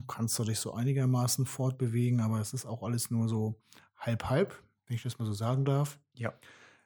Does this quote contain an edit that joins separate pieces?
no; 0 cuts

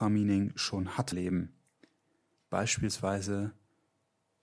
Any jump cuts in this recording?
yes; 1 cut; at 1.1 s

